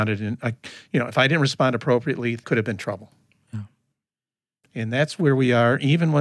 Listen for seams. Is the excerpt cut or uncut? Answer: cut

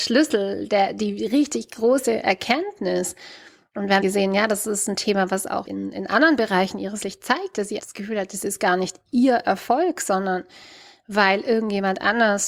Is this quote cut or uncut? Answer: cut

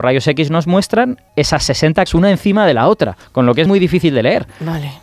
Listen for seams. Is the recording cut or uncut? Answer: cut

